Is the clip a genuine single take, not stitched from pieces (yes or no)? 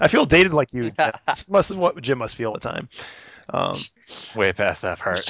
no